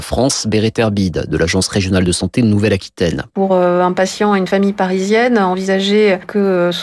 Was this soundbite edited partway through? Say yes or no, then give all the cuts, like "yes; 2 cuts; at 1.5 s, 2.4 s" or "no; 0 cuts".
no; 0 cuts